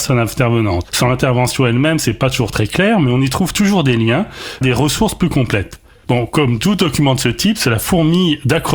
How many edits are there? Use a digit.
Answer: 1